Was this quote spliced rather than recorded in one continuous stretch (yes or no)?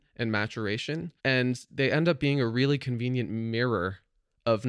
yes